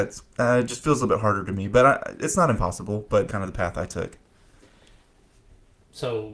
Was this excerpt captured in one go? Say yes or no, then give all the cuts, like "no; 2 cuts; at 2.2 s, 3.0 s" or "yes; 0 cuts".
no; 1 cut; at 3.3 s